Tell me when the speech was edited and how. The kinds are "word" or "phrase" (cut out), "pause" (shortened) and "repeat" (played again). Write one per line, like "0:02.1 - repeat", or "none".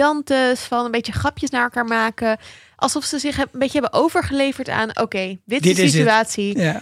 none